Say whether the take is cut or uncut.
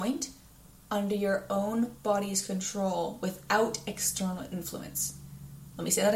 uncut